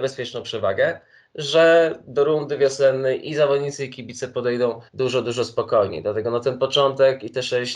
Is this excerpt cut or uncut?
cut